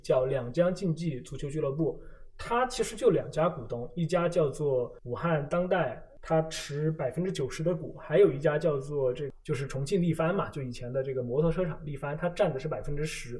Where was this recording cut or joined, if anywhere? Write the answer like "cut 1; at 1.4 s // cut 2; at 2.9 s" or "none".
none